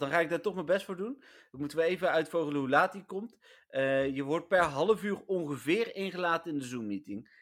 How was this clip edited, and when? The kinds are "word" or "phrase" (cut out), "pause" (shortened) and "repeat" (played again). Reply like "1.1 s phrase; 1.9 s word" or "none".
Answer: none

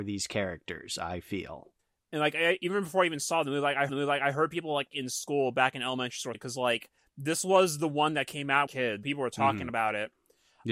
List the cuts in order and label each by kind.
1.8 s pause; 3.9 s repeat; 6.3 s phrase; 8.7 s phrase; 9.0 s word

